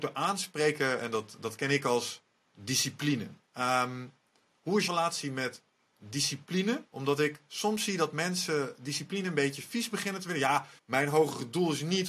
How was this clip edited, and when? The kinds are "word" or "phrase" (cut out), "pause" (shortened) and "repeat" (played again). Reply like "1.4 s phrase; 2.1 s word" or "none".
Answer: 3.4 s pause; 4.9 s word; 6.9 s pause; 10.8 s word

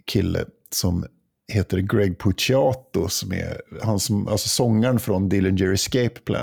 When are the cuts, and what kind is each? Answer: none

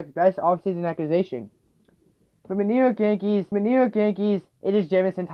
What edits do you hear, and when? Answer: 3.5 s repeat

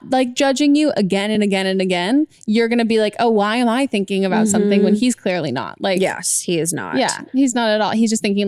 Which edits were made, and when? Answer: none

